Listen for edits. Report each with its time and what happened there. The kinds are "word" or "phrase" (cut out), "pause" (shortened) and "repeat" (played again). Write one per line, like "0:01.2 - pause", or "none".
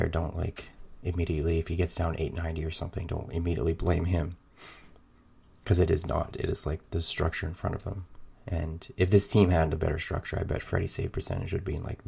none